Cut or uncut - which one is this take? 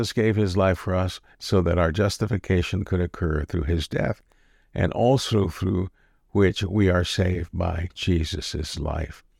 uncut